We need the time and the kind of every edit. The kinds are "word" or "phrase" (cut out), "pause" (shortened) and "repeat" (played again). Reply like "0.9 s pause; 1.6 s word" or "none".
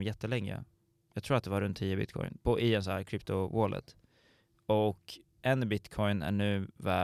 none